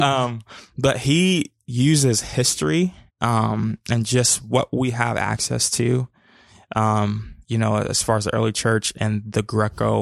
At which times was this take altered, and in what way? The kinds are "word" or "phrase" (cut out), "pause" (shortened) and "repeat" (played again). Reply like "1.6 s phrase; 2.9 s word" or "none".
3.1 s pause; 7.4 s pause